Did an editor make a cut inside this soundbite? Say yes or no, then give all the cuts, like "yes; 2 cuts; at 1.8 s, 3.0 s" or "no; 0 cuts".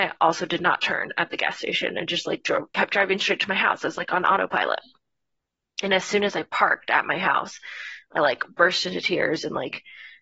no; 0 cuts